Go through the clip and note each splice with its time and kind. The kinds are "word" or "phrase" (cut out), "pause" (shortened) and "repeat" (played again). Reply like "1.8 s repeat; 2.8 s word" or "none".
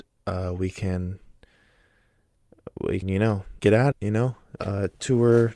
3.0 s word; 3.6 s word; 3.9 s word; 4.6 s word